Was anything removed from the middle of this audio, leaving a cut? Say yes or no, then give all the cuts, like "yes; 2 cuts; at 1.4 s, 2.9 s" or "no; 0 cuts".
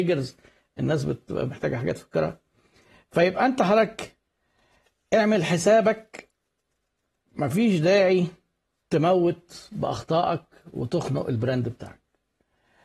no; 0 cuts